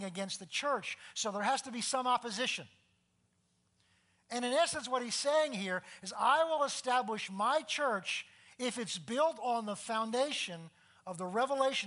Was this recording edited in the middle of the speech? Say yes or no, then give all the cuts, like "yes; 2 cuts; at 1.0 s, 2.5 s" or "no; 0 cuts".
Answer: no; 0 cuts